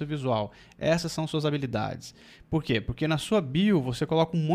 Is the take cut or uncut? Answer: uncut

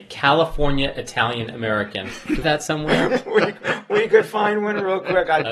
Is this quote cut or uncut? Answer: cut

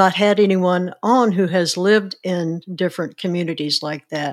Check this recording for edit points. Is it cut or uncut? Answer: uncut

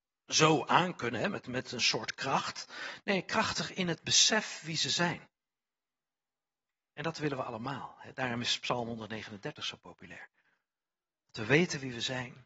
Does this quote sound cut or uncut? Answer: uncut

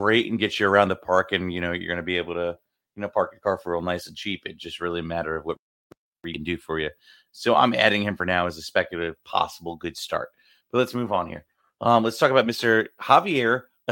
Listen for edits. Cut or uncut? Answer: uncut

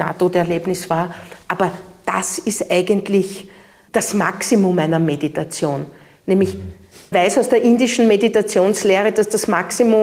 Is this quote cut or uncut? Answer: cut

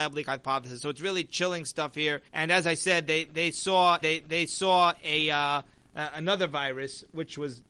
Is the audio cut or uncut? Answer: cut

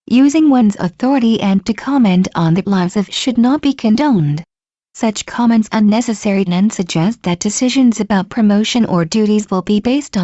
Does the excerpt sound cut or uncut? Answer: cut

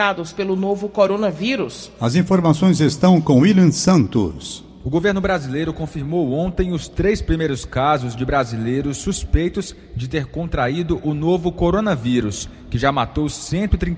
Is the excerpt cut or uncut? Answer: uncut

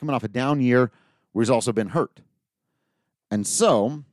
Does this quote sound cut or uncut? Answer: uncut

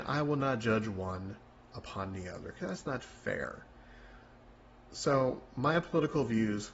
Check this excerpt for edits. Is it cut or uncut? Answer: uncut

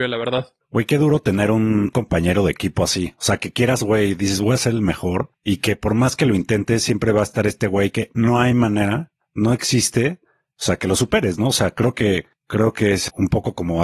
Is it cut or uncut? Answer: uncut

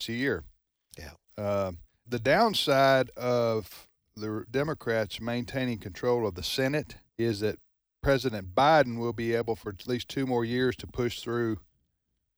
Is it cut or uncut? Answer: cut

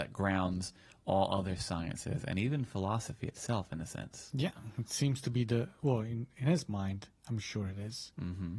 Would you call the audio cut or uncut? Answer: uncut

